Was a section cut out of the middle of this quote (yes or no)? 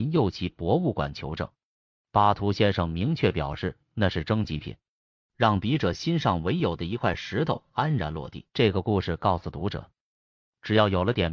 yes